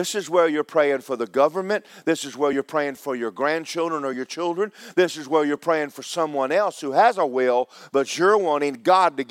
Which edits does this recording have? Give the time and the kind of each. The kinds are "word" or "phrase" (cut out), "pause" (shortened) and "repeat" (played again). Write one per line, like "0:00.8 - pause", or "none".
none

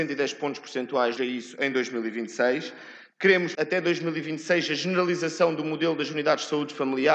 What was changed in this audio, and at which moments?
0:01.2 - phrase
0:03.5 - word

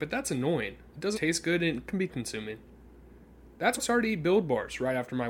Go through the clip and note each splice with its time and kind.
0:01.1 - word
0:02.1 - word
0:03.8 - word

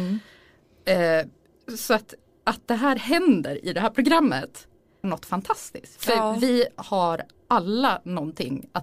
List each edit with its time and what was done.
0:05.0 - word

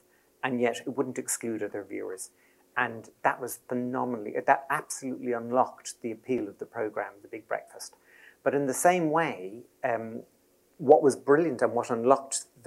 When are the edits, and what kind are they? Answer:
none

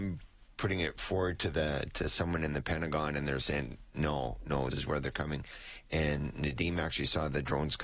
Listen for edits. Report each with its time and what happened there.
0:04.7 - word

